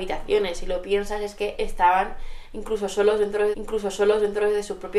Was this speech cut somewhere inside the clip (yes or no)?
yes